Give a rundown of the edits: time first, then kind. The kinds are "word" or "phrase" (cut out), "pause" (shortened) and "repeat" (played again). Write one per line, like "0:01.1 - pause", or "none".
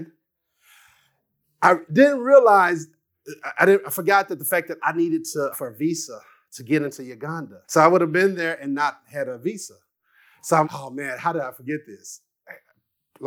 0:05.5 - word
0:07.6 - pause
0:10.6 - word